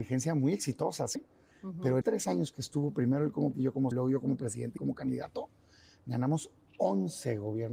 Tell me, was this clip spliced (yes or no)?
yes